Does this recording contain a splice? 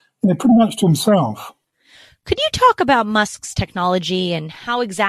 no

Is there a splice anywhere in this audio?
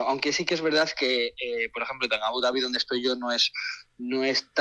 no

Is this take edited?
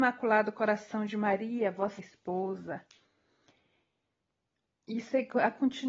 yes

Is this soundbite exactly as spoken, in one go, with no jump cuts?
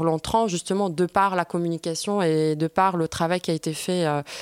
yes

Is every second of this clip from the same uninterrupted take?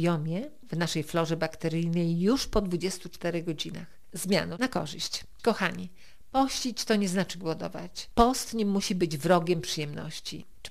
yes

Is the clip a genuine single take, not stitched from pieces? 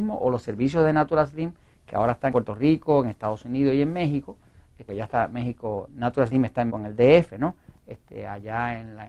no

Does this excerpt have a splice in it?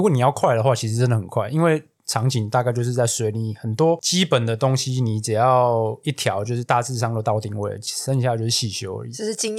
no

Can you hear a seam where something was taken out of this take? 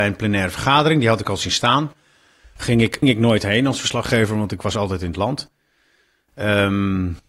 yes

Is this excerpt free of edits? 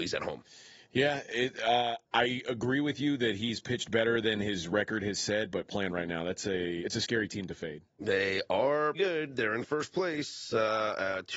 no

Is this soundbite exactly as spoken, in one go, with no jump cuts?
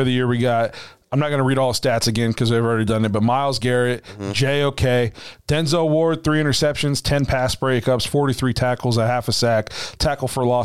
yes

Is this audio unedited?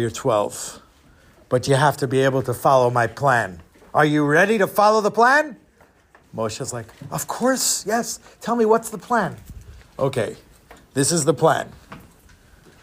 yes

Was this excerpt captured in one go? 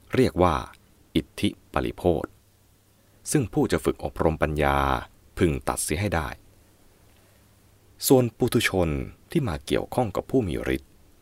yes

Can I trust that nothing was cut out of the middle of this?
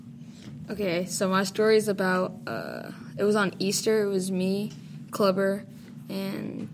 yes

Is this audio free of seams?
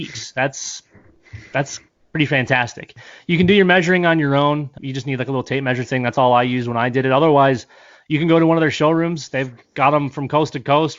yes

